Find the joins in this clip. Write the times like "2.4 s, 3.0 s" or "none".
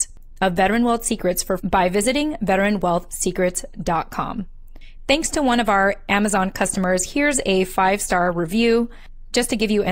1.6 s